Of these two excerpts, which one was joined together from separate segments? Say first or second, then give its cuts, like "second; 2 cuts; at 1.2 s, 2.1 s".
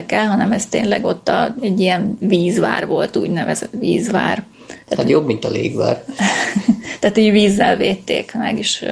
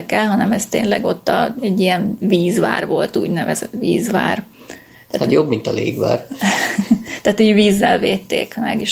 first; 1 cut; at 4.8 s